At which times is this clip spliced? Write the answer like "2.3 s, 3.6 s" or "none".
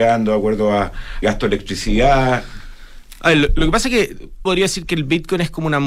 1.2 s, 4.5 s